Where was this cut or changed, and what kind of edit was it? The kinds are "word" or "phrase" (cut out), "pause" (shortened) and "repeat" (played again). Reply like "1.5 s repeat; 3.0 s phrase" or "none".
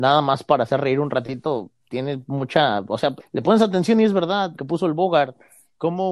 1.8 s pause; 3.2 s word; 4.6 s word